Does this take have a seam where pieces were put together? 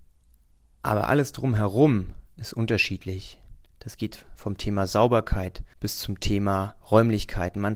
yes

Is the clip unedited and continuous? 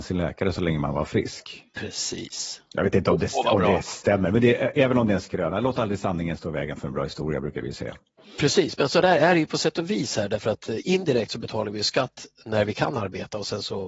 yes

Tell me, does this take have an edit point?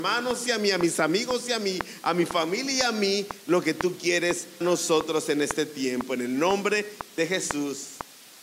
yes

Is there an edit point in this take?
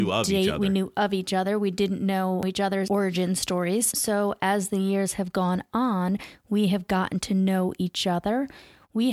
no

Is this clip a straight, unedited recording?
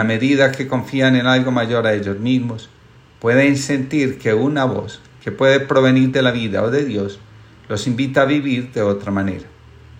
yes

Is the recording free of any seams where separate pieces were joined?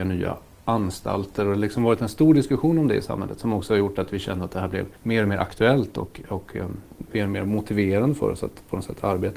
no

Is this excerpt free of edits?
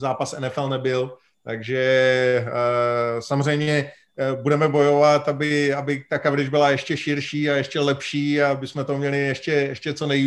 yes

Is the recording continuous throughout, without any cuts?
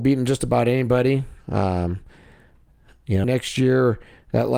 no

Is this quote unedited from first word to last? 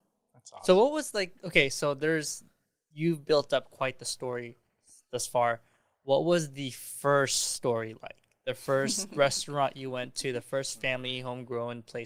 yes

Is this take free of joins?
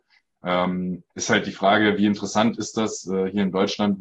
no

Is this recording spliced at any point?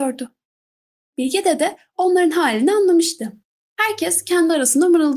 yes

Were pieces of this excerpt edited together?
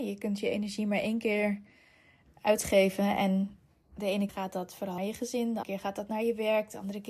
yes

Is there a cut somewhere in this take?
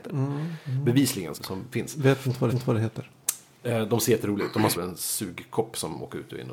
yes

